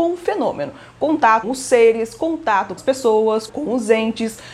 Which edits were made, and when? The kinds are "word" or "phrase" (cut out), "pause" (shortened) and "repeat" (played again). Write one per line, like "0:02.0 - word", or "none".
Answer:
0:01.4 - word
0:02.8 - word
0:03.5 - word